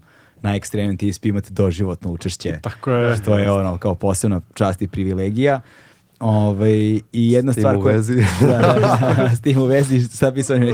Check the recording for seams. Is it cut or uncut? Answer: uncut